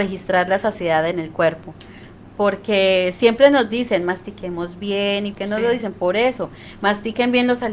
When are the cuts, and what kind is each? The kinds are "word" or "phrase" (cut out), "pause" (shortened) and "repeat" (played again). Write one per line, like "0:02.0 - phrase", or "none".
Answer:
0:02.3 - word
0:05.3 - word